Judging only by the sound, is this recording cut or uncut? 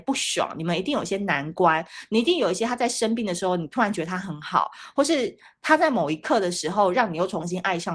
uncut